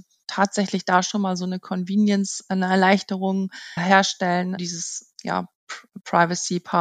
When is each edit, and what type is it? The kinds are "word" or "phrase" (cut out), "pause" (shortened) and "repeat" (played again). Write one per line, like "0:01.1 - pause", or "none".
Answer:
0:03.8 - word
0:04.6 - word